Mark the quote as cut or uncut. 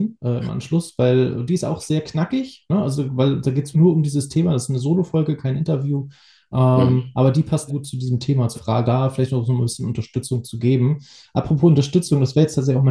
cut